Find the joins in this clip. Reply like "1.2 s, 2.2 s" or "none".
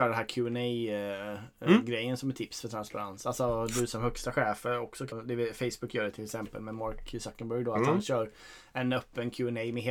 5.1 s

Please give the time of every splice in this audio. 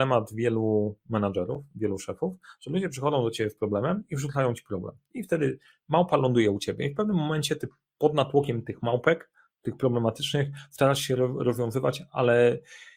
none

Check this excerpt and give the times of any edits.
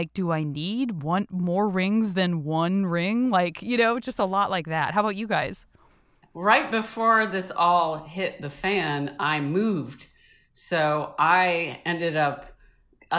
none

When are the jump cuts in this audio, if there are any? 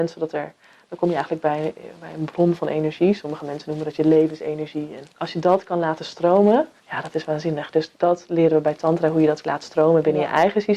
5.1 s, 6.8 s, 8.0 s

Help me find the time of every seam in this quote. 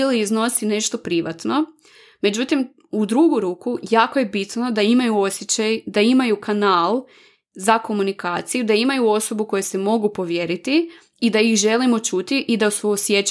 none

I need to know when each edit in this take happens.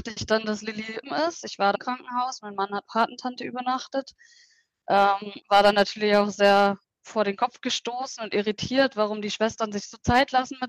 1.0 s, 1.7 s, 2.8 s, 5.4 s, 6.8 s

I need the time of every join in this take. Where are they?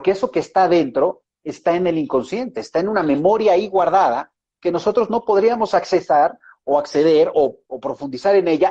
none

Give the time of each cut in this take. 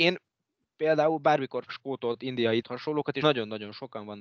1.7 s, 2.6 s, 3.2 s

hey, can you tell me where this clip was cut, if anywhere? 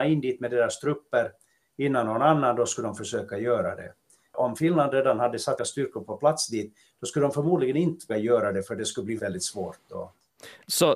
5.6 s, 8.1 s, 9.2 s

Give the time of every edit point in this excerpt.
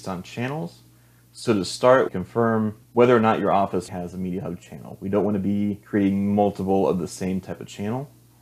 2.1 s, 2.8 s, 3.9 s, 5.8 s

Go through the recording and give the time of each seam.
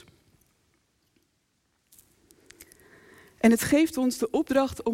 none

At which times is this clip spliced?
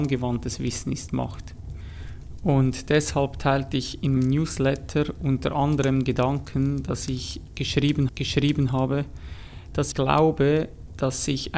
4.2 s, 6.1 s, 8.1 s, 9.9 s

